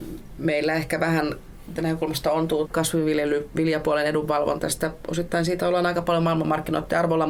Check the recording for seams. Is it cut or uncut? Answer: cut